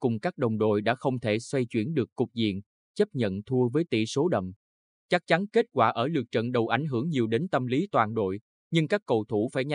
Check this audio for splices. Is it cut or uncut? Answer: uncut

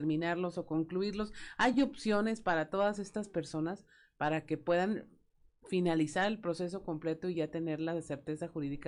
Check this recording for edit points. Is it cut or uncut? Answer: uncut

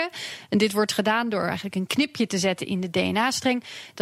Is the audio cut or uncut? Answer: uncut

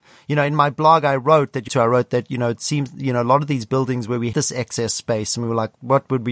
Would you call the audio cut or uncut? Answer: cut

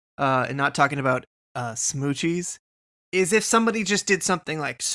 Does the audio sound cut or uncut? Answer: uncut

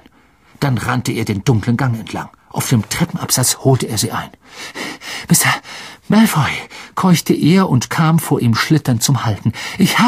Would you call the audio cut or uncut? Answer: cut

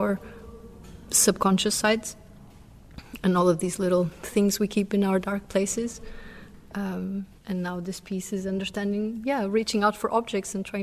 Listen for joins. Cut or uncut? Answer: cut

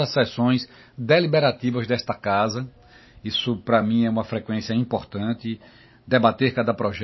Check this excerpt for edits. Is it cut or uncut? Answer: uncut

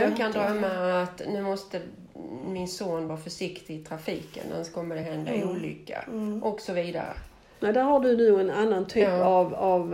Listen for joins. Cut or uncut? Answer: uncut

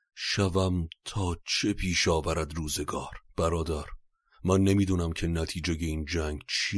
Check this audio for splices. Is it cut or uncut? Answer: cut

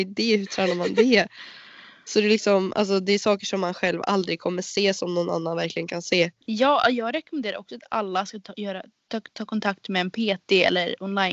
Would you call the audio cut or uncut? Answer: cut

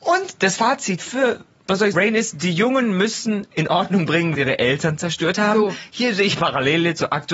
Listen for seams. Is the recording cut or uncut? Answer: cut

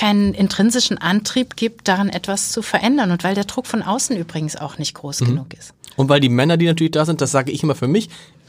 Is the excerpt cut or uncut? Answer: uncut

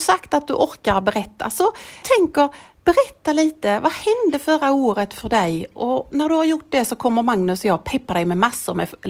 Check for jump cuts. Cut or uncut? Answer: cut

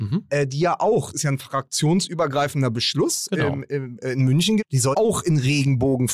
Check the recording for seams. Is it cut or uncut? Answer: cut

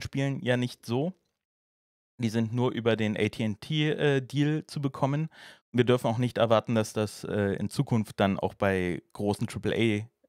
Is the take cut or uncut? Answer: uncut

